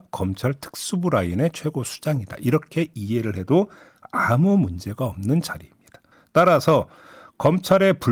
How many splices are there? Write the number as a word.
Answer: one